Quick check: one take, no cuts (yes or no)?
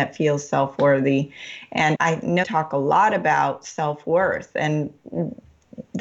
no